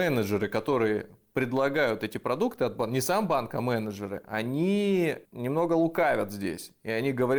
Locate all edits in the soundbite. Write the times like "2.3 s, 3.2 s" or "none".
5.3 s